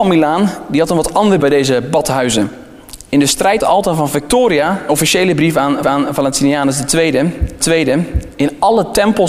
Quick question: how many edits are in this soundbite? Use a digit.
5